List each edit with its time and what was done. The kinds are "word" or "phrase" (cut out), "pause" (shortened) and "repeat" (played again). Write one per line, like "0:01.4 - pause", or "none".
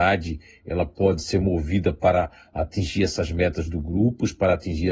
none